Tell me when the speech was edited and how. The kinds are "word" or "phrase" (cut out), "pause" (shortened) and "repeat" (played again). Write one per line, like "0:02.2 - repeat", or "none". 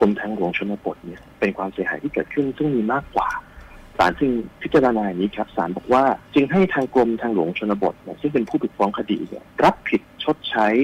0:06.2 - pause